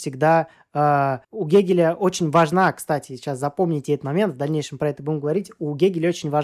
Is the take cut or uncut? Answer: cut